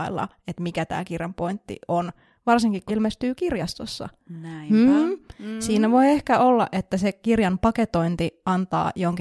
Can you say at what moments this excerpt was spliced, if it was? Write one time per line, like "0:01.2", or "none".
0:02.9
0:03.4